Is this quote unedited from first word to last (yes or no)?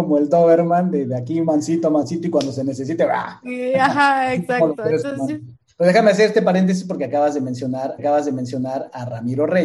no